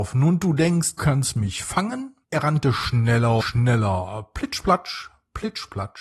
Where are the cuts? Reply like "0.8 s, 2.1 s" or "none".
1.0 s, 2.2 s, 3.4 s